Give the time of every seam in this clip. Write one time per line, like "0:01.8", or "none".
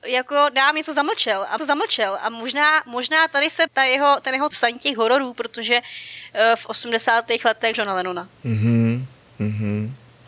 0:01.6
0:03.7
0:04.5
0:07.7
0:08.4